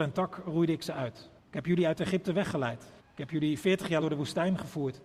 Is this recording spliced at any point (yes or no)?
yes